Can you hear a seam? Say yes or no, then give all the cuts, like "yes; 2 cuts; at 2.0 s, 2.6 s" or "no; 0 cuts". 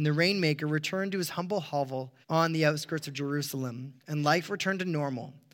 yes; 2 cuts; at 2.2 s, 4.0 s